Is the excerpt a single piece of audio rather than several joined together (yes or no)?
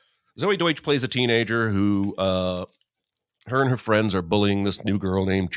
yes